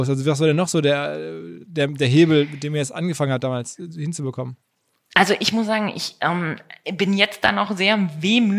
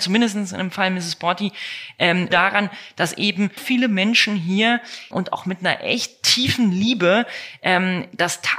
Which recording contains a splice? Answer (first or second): second